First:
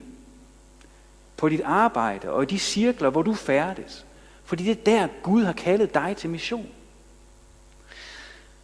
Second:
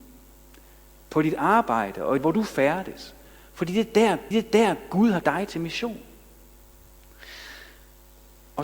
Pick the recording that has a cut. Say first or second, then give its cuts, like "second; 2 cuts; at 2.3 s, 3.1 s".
second; 3 cuts; at 2.2 s, 4.3 s, 5.2 s